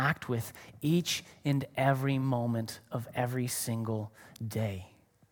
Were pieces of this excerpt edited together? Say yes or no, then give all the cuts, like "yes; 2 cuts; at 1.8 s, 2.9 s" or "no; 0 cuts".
no; 0 cuts